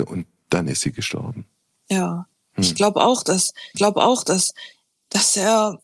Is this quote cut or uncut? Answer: cut